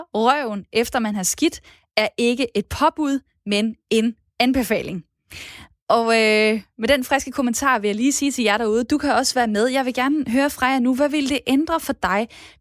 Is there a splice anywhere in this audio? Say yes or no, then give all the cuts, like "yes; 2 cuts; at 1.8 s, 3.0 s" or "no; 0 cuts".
no; 0 cuts